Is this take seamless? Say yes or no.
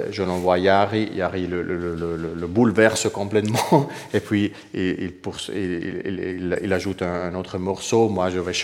yes